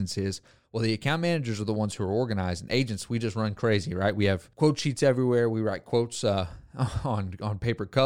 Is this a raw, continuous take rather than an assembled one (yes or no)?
no